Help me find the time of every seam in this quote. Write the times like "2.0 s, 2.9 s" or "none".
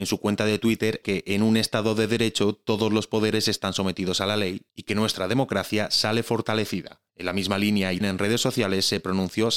1.0 s, 7.1 s, 8.0 s

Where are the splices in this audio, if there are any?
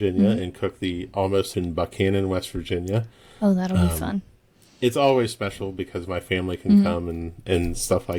1.5 s

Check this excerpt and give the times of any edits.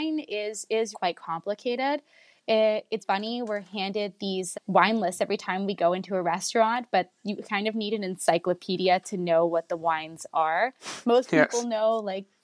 0.9 s, 3.0 s, 4.5 s

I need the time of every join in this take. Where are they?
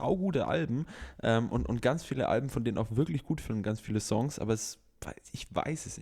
none

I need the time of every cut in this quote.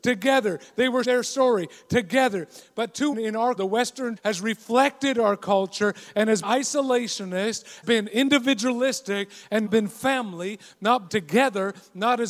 1.0 s, 3.1 s, 3.6 s, 4.2 s, 6.4 s, 7.8 s, 9.7 s, 11.1 s

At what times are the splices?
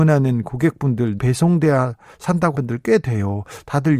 1.2 s, 2.5 s

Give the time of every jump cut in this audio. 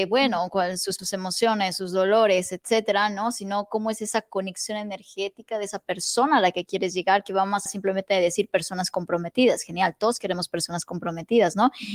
1.0 s, 7.7 s

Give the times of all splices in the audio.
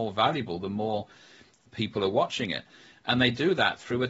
none

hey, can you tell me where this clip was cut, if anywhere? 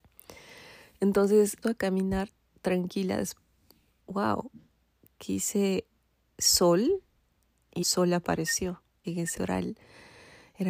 1.6 s, 4.0 s, 7.8 s, 9.0 s, 9.4 s

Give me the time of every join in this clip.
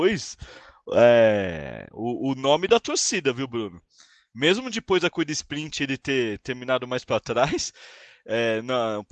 none

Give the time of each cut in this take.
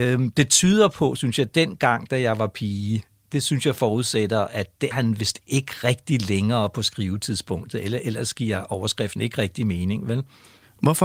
4.9 s

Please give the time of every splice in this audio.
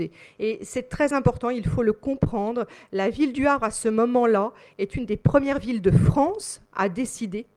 none

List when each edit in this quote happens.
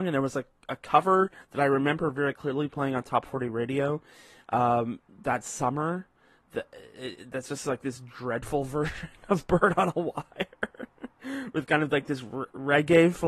none

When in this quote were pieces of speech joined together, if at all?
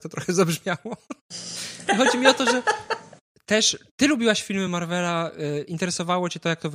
none

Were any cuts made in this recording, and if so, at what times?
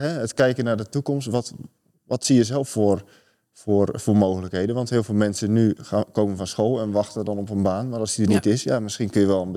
none

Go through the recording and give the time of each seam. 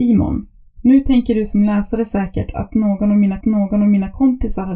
3.4 s

